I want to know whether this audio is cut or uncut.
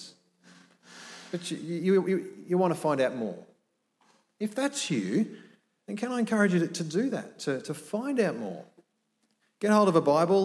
uncut